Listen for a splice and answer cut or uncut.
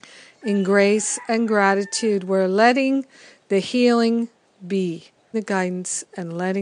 cut